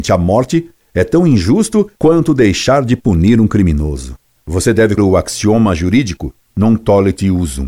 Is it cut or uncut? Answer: cut